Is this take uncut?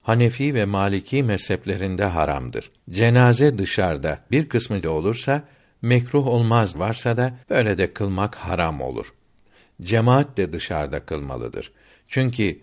no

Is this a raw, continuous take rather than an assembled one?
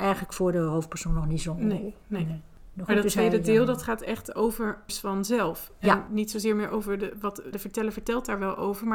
no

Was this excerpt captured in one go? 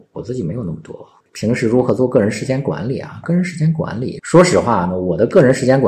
yes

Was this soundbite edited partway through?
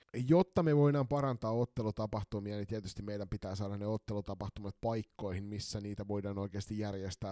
no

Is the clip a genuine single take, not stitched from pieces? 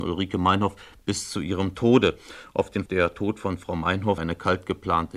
no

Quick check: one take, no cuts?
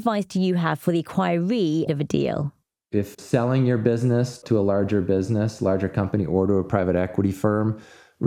no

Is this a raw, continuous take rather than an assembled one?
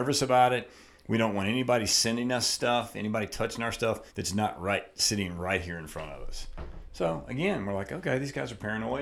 no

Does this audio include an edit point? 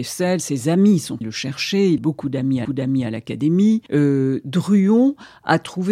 yes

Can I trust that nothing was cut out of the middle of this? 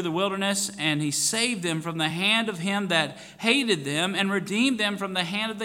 yes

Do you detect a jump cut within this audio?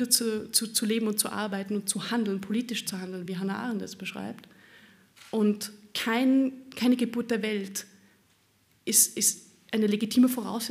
no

